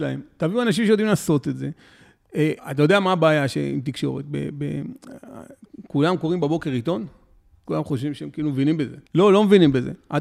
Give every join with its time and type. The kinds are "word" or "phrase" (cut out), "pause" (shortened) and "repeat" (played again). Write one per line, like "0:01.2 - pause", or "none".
0:02.6 - pause
0:07.7 - word
0:09.1 - pause